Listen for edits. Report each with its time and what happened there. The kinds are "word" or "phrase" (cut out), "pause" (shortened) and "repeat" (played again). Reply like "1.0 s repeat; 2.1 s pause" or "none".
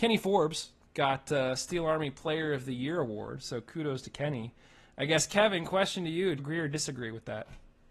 6.4 s word